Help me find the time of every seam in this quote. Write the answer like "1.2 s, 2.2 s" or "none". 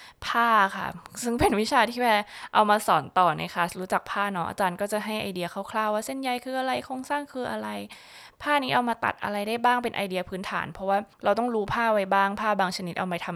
11.1 s